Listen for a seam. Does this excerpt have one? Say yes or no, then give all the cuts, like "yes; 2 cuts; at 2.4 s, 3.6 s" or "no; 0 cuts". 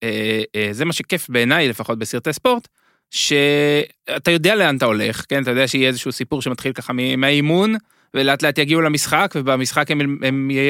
no; 0 cuts